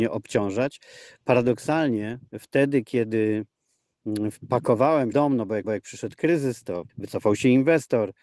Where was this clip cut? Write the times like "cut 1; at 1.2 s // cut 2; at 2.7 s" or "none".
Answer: cut 1; at 2.3 s // cut 2; at 5.1 s // cut 3; at 5.6 s // cut 4; at 6.9 s